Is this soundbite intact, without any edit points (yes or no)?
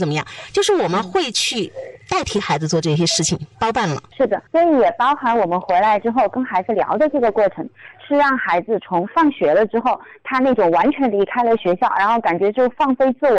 no